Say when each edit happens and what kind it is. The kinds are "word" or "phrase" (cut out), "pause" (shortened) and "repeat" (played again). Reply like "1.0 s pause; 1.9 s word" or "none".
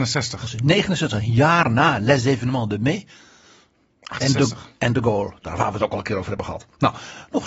none

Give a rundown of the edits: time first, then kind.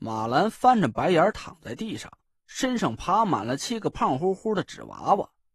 none

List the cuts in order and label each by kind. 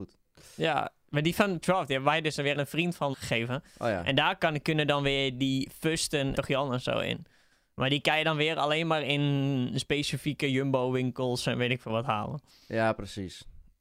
1.6 s word; 2.6 s word; 3.1 s word; 6.3 s word

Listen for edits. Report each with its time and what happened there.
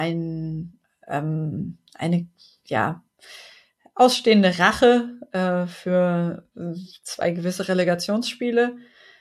none

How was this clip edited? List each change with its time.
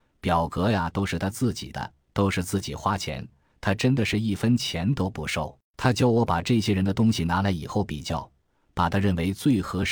5.6 s pause

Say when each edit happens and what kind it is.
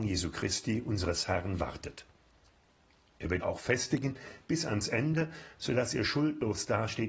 3.4 s word

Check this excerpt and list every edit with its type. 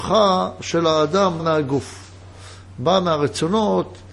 1.4 s word

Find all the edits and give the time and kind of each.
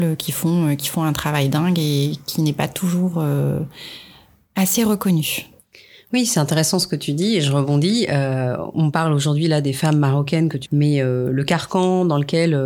8.7 s word; 10.7 s word

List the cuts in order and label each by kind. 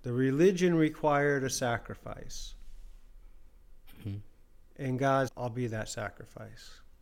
5.3 s word

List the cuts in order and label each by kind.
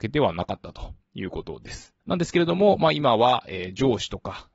2.0 s pause

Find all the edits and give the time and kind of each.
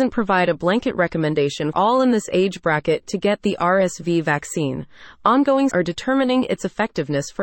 1.7 s word; 5.7 s word

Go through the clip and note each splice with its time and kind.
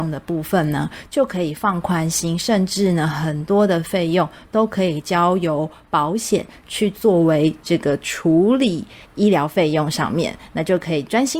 9.0 s pause

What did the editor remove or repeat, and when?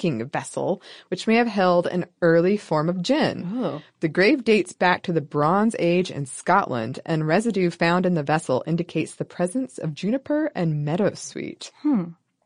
none

